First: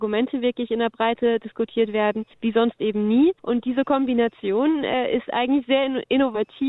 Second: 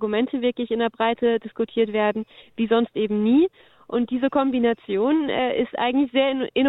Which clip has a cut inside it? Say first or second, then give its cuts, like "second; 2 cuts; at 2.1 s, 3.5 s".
first; 2 cuts; at 2.3 s, 3.4 s